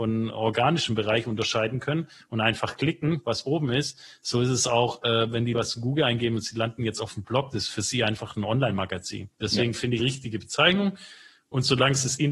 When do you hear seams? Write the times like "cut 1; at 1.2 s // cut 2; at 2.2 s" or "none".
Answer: cut 1; at 5.5 s // cut 2; at 9.3 s // cut 3; at 10.0 s